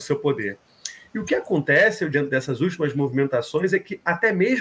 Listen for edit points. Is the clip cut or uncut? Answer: cut